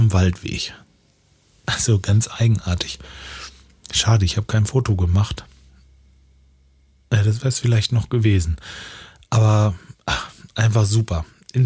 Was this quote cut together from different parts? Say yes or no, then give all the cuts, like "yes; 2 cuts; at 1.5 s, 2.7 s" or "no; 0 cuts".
no; 0 cuts